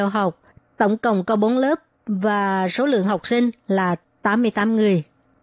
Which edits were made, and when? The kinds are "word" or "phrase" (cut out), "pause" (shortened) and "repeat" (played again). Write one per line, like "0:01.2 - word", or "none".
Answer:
none